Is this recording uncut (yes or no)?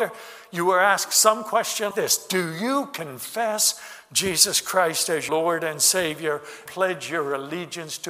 no